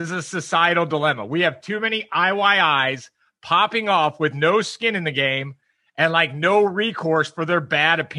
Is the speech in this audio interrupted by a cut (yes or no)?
no